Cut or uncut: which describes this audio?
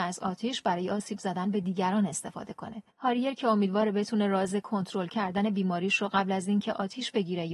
cut